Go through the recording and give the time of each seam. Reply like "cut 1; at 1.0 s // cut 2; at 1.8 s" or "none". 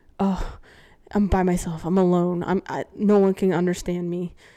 none